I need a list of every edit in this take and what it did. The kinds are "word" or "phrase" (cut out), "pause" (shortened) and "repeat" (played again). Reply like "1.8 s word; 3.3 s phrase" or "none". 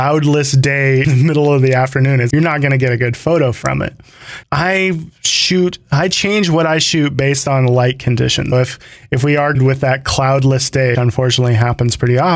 1.0 s word; 2.3 s word; 4.4 s word; 8.5 s word; 9.5 s word; 10.9 s word